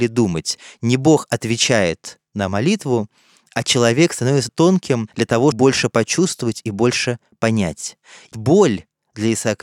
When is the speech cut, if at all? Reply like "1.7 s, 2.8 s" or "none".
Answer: 4.5 s, 5.5 s, 8.3 s